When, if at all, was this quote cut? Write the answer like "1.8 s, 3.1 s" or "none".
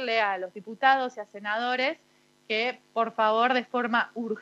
none